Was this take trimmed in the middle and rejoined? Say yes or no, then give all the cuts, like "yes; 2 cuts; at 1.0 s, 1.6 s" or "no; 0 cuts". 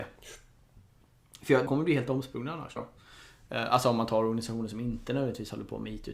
yes; 2 cuts; at 1.7 s, 2.8 s